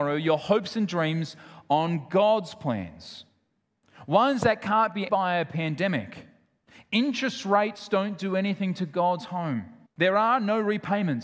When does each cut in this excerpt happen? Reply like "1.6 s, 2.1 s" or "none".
5.1 s, 9.9 s